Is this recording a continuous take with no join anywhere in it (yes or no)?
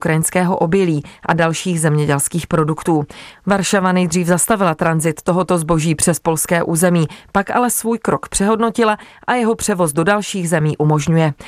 yes